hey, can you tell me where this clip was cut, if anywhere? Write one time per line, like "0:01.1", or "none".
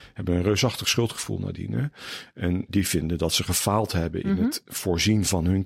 0:02.7